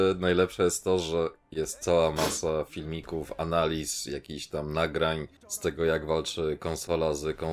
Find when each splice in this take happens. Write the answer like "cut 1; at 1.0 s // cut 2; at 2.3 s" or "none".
cut 1; at 5.4 s

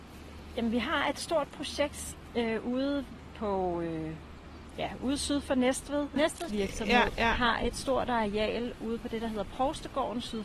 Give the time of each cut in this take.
cut 1; at 6.5 s

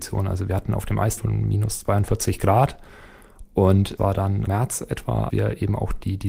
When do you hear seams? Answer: cut 1; at 1.2 s // cut 2; at 4.0 s // cut 3; at 4.5 s // cut 4; at 5.3 s

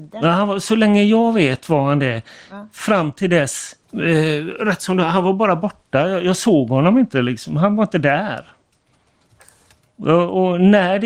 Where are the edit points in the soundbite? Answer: cut 1; at 3.8 s

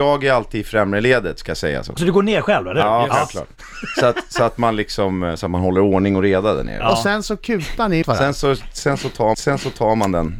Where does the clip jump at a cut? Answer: cut 1; at 2.0 s // cut 2; at 8.0 s // cut 3; at 9.3 s

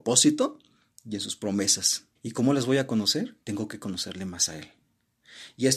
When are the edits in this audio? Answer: cut 1; at 2.2 s // cut 2; at 3.4 s

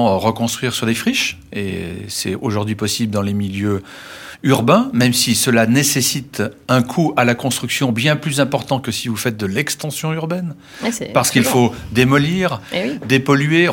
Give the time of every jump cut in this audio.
none

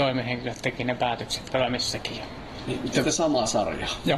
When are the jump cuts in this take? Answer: cut 1; at 1.5 s // cut 2; at 3.0 s

